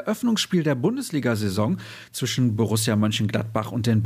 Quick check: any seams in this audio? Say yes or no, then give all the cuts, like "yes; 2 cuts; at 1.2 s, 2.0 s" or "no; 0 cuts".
no; 0 cuts